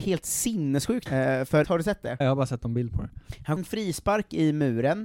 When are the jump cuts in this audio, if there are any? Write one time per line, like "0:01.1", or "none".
0:01.1
0:01.6
0:02.2
0:03.6